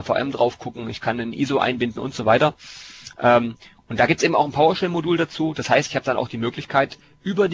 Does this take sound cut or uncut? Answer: uncut